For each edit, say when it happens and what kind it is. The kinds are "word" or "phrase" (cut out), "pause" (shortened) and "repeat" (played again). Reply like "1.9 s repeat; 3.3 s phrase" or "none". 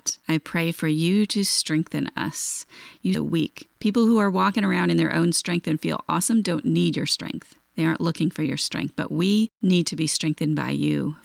3.1 s word